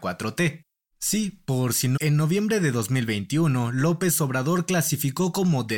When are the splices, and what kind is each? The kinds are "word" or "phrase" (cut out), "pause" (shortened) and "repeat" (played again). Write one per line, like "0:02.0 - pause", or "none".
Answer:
0:02.0 - phrase

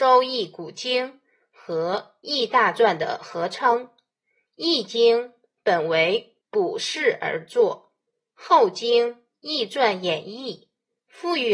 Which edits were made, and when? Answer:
0:06.4 - pause

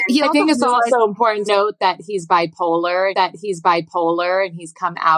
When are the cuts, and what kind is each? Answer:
0:01.5 - word
0:03.1 - repeat

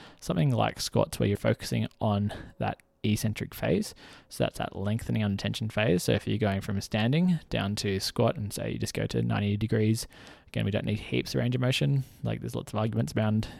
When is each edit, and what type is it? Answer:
0:01.4 - word

